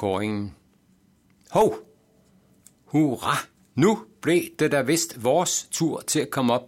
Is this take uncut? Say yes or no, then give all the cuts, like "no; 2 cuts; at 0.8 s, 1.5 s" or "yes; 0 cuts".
yes; 0 cuts